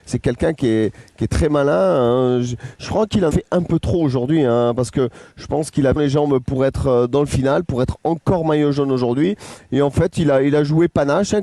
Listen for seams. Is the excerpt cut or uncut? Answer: cut